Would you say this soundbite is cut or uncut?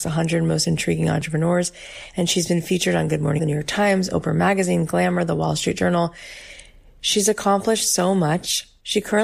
cut